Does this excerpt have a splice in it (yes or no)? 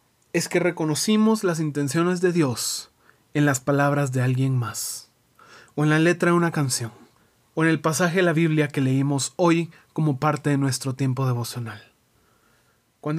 no